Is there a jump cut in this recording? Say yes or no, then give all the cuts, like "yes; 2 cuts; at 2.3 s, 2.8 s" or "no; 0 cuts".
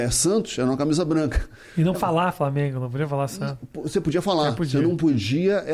yes; 1 cut; at 1.9 s